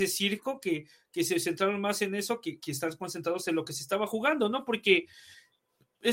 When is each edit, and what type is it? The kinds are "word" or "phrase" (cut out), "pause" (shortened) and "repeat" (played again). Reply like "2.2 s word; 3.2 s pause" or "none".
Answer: none

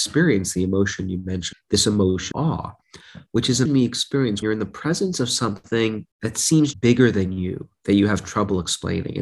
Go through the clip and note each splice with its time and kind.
1.5 s word; 2.3 s word; 3.6 s word; 4.4 s word; 6.1 s pause; 6.7 s word

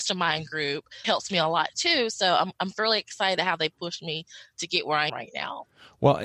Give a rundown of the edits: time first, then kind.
1.0 s word; 5.1 s word

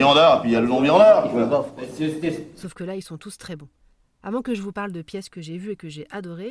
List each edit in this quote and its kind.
none

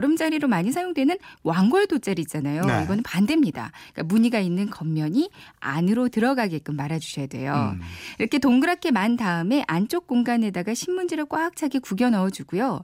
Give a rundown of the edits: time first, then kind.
none

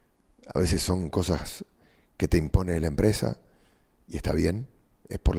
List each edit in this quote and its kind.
none

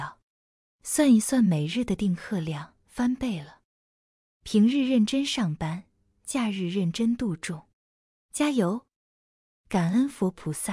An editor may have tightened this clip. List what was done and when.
2.8 s pause

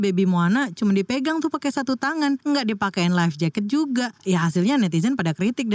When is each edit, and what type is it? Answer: none

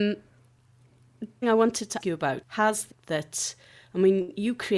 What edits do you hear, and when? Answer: 1.4 s word; 2.0 s word; 2.4 s word; 2.9 s word

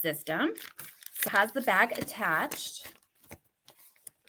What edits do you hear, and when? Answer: 1.3 s word

